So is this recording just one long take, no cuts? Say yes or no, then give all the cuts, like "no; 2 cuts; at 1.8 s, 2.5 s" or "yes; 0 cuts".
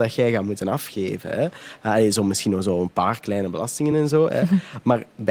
yes; 0 cuts